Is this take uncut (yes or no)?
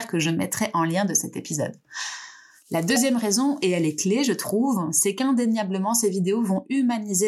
yes